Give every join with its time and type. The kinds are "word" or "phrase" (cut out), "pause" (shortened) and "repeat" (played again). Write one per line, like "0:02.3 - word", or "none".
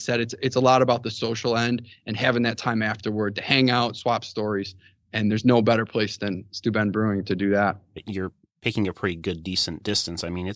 none